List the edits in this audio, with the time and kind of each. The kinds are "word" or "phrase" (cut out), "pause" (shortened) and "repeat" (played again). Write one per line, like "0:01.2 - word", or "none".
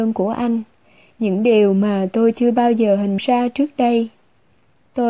0:03.2 - word